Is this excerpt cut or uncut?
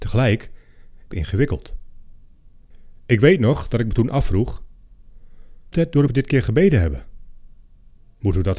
cut